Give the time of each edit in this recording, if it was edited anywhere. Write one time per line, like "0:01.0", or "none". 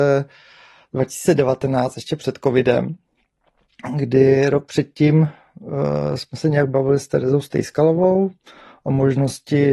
none